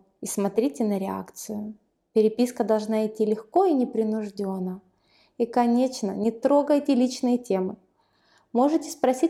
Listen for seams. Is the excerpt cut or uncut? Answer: uncut